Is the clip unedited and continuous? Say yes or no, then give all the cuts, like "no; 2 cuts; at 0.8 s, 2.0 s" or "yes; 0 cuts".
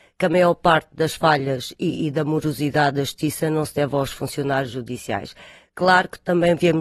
yes; 0 cuts